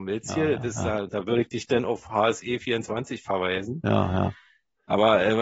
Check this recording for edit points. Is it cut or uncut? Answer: uncut